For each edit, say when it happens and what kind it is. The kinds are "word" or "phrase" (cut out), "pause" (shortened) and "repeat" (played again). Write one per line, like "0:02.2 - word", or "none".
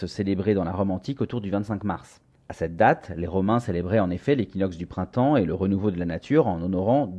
0:02.3 - pause